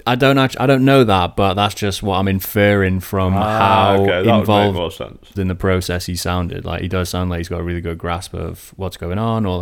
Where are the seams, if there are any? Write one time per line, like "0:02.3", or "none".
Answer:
0:05.3